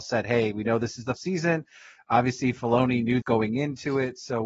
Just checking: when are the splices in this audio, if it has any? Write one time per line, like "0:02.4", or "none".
0:01.2
0:03.2